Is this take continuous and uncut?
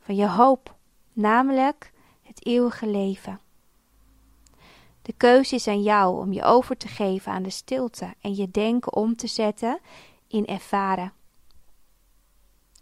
yes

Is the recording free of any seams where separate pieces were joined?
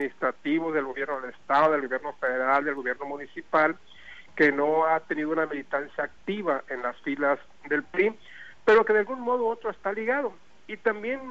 yes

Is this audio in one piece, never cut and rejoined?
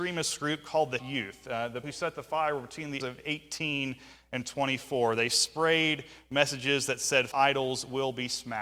no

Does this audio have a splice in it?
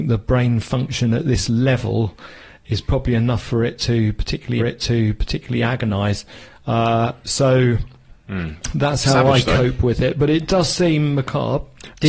yes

